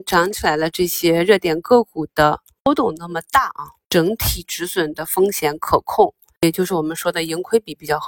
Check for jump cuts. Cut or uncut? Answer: uncut